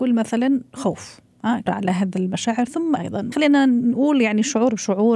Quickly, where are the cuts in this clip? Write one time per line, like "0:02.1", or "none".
0:01.7
0:03.0
0:03.3